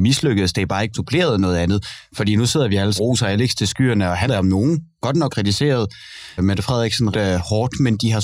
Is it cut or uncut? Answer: cut